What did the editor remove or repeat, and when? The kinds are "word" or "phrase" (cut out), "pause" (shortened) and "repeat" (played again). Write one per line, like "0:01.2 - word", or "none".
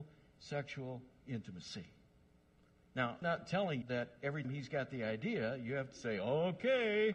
0:03.2 - word
0:03.8 - word
0:04.4 - word